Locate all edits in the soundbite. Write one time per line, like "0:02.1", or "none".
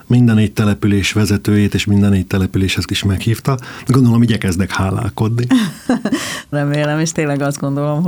0:02.9
0:06.5
0:07.1